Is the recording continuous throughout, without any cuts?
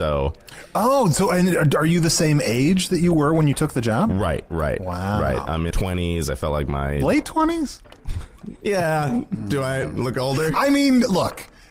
no; 1 cut; at 5.7 s

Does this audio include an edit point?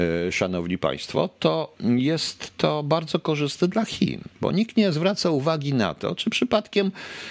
no; 0 cuts

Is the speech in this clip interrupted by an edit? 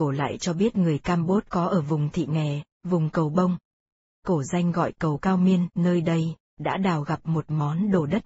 yes; 1 cut; at 4.0 s

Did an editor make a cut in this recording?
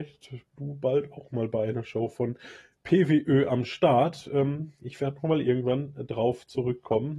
no; 0 cuts

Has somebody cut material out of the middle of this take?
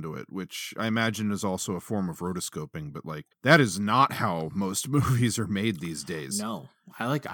yes; 1 cut; at 3.3 s

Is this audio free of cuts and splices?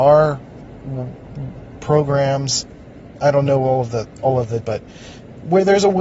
no; 1 cut; at 4.6 s

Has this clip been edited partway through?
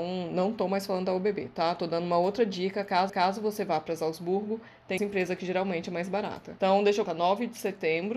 yes; 3 cuts; at 3.1 s, 5.0 s, 7.1 s

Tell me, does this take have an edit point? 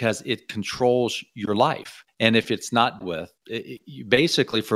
yes; 3 cuts; at 2.1 s, 3.0 s, 3.4 s

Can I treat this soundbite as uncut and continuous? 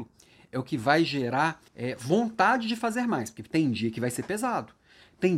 no; 1 cut; at 1.7 s

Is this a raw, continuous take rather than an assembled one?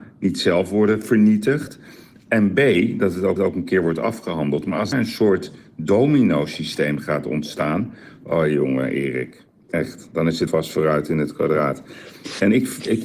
no; 3 cuts; at 3.4 s, 4.9 s, 10.5 s

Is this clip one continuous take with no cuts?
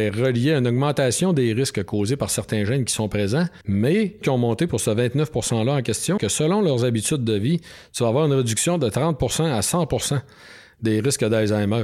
no; 3 cuts; at 3.6 s, 4.2 s, 6.2 s

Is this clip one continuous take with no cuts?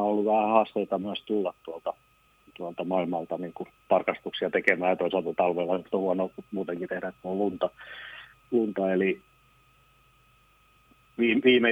yes; 0 cuts

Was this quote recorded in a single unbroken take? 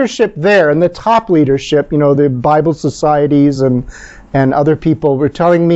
yes; 0 cuts

